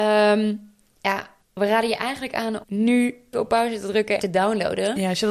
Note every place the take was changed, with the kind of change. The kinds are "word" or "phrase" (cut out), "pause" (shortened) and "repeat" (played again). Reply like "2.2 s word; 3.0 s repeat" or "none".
1.4 s pause; 2.6 s word; 3.3 s word; 4.2 s phrase